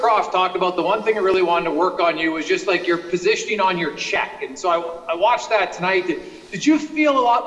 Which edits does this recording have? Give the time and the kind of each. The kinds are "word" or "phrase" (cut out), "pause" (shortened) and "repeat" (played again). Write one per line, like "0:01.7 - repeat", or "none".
none